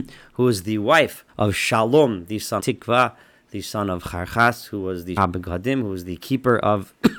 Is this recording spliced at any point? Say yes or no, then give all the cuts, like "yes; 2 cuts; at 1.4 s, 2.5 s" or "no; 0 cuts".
yes; 3 cuts; at 1.3 s, 2.6 s, 5.2 s